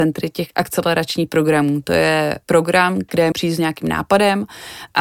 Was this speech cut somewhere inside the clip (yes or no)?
yes